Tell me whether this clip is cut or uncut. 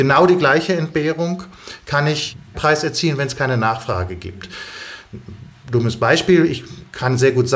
cut